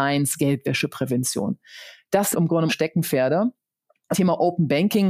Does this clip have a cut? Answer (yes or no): yes